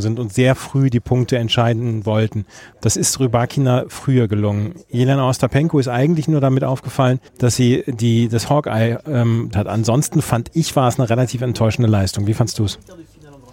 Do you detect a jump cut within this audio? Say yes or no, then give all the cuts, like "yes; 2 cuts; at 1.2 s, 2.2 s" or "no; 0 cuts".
yes; 2 cuts; at 7.3 s, 9.5 s